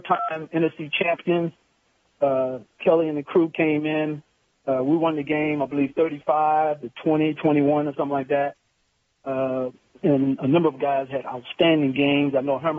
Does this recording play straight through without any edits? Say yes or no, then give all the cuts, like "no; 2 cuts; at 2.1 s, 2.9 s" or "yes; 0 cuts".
yes; 0 cuts